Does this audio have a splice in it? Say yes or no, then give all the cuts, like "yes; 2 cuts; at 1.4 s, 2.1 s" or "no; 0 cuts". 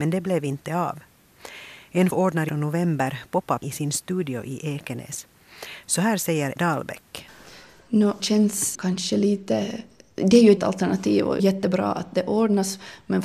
yes; 8 cuts; at 2.1 s, 2.5 s, 3.6 s, 6.6 s, 8.2 s, 8.7 s, 10.6 s, 11.4 s